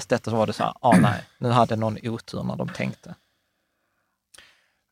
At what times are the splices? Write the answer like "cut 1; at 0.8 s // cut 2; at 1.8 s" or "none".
none